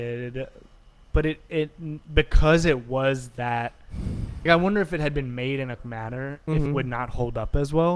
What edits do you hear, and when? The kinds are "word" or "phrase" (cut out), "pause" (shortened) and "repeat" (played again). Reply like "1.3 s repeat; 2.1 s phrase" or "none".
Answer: 4.5 s word; 5.8 s phrase; 6.7 s word